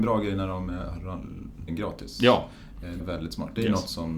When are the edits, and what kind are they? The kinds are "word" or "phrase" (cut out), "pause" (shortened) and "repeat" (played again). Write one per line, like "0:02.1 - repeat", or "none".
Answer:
0:01.7 - phrase
0:03.0 - word